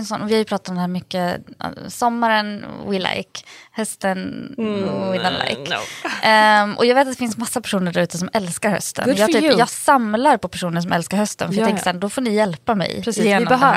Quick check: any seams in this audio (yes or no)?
no